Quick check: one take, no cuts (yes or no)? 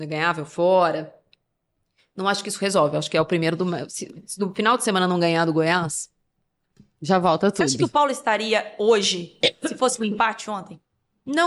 yes